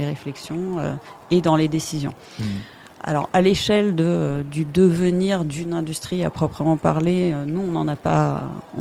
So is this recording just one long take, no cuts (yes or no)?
yes